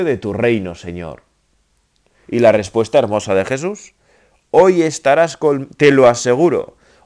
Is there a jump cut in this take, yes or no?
no